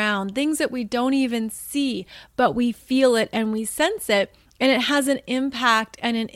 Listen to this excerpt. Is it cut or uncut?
uncut